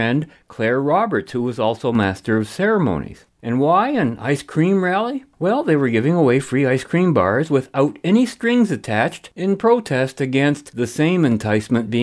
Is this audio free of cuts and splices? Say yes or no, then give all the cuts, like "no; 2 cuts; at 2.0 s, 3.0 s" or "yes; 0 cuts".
yes; 0 cuts